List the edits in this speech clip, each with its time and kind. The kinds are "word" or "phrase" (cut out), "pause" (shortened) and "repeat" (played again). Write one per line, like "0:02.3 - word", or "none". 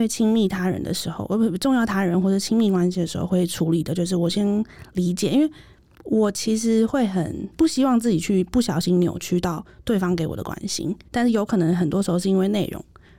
0:11.1 - pause